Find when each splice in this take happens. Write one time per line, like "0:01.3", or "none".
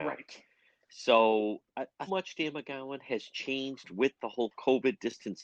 0:02.1